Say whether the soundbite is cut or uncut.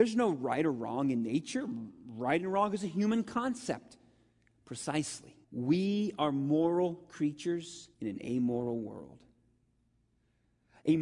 cut